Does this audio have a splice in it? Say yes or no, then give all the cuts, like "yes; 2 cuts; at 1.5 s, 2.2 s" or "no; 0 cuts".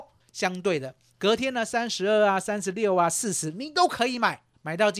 no; 0 cuts